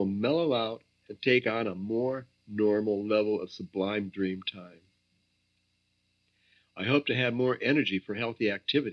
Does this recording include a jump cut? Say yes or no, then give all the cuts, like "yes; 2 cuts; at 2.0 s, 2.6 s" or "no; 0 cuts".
no; 0 cuts